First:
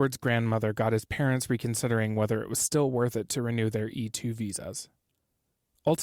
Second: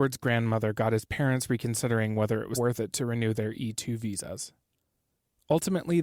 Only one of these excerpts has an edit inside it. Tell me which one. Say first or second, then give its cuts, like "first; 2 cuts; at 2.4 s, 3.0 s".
second; 1 cut; at 2.6 s